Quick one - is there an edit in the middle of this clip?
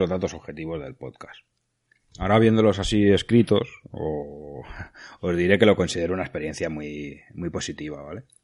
no; 0 cuts

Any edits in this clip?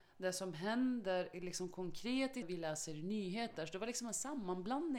yes; 1 cut; at 2.4 s

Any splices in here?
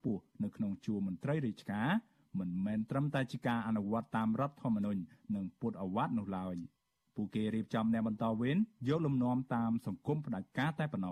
no; 0 cuts

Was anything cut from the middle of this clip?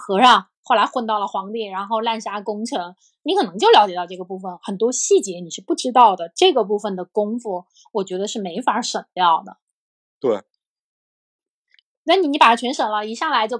no; 0 cuts

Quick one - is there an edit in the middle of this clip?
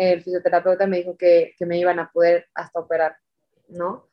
no; 0 cuts

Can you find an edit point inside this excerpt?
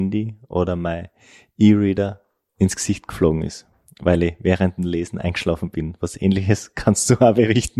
no; 0 cuts

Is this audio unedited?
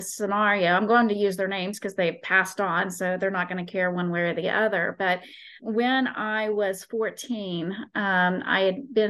no; 1 cut; at 5.6 s

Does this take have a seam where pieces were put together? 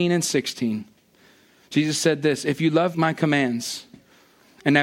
yes; 1 cut; at 2.9 s

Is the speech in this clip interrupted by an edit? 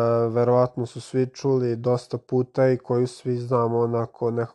no; 0 cuts

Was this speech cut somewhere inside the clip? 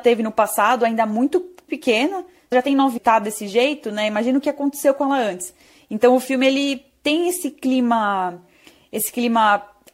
yes; 3 cuts; at 1.7 s, 2.5 s, 3.0 s

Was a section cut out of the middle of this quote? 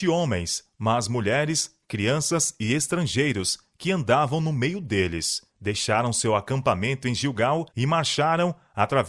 yes; 2 cuts; at 5.5 s, 7.7 s

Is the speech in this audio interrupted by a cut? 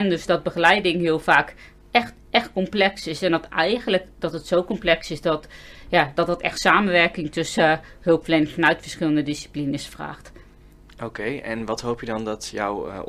no; 0 cuts

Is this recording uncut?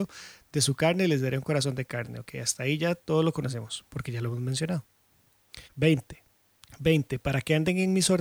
no; 1 cut; at 5.7 s

